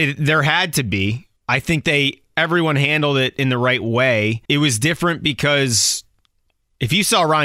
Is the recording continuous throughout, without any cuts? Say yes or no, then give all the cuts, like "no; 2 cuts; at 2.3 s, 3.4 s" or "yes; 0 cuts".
no; 2 cuts; at 1.4 s, 4.4 s